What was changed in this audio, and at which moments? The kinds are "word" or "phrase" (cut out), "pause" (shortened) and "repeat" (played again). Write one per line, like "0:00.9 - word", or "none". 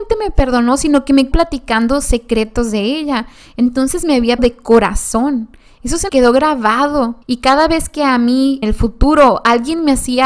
0:01.3 - word
0:04.4 - word
0:06.1 - word
0:07.2 - pause
0:08.6 - word